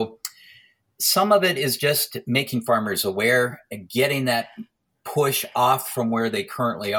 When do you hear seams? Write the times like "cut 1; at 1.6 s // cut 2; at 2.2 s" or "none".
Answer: none